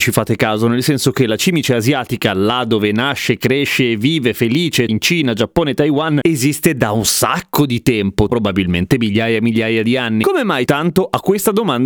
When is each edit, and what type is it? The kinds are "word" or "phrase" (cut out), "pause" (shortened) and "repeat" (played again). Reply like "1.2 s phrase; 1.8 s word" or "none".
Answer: 4.9 s word; 8.3 s word; 10.7 s phrase